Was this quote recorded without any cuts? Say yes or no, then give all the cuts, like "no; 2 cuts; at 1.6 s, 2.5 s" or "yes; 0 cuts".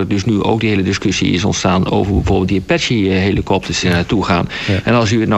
no; 1 cut; at 3.8 s